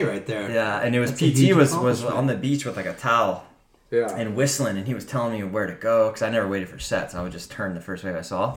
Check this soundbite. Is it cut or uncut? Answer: uncut